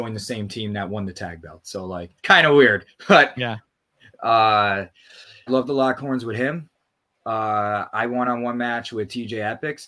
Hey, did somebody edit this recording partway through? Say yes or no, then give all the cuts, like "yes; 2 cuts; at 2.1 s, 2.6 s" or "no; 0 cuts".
yes; 3 cuts; at 2.2 s, 5.5 s, 8.2 s